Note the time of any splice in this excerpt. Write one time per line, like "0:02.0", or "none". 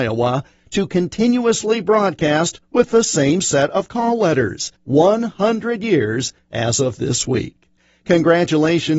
0:04.8